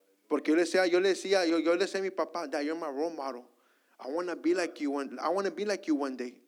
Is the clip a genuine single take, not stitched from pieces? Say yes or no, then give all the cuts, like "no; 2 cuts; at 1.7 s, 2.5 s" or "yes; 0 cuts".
yes; 0 cuts